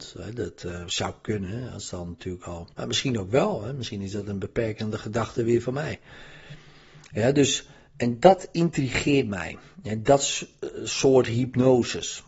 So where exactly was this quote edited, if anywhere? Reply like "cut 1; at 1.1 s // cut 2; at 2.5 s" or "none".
cut 1; at 2.7 s